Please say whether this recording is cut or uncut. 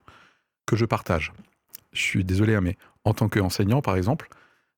uncut